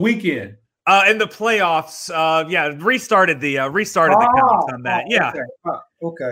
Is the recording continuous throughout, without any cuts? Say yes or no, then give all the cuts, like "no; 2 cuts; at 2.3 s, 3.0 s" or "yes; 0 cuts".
yes; 0 cuts